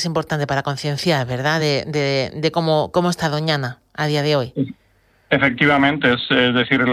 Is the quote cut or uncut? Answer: uncut